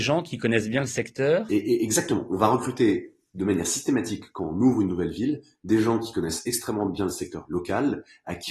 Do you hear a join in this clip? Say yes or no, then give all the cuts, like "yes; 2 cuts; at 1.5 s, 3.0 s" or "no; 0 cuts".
no; 0 cuts